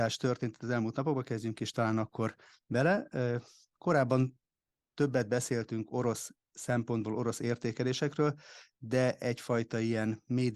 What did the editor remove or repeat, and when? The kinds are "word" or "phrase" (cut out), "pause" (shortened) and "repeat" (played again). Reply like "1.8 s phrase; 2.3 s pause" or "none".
none